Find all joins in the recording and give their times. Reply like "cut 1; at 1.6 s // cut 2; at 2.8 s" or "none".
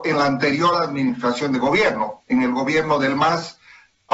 none